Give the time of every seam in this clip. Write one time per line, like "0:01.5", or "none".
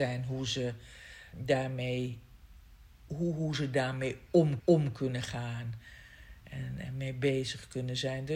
0:01.3
0:03.1
0:04.6

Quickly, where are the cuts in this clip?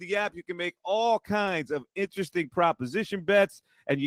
none

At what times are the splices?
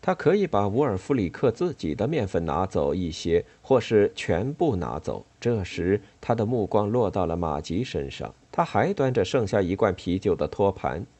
0:05.3
0:08.4

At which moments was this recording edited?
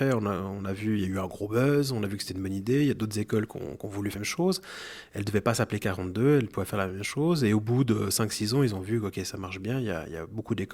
0:04.2

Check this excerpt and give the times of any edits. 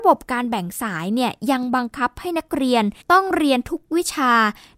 0:03.0

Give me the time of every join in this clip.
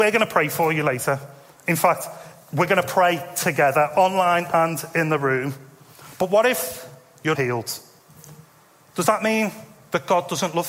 0:07.4

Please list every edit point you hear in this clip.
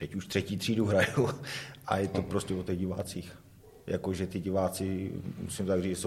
none

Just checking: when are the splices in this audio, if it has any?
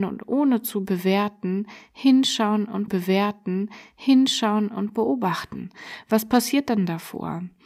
0:02.9

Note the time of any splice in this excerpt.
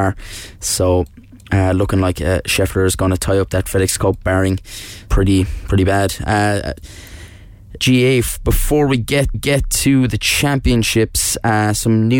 0:05.1
0:07.8
0:09.3

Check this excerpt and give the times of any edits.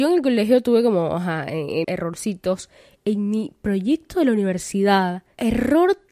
0:01.8

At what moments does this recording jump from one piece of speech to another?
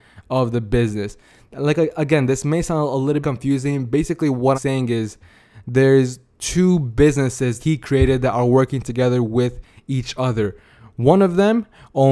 0:03.2
0:04.5
0:07.6

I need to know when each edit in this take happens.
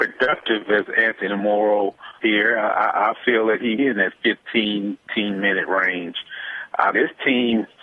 0:02.2
0:03.8
0:05.0
0:06.9

